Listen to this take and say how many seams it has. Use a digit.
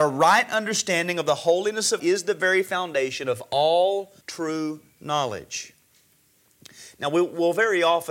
2